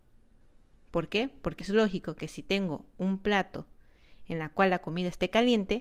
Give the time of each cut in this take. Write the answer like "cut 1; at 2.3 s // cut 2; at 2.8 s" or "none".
cut 1; at 1.6 s